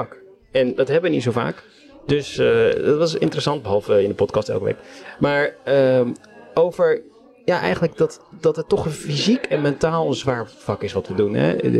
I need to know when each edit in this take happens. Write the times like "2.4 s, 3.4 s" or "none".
none